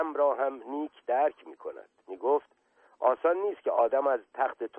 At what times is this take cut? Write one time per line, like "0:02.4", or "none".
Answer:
0:02.0